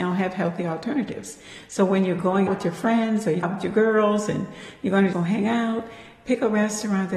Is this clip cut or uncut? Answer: cut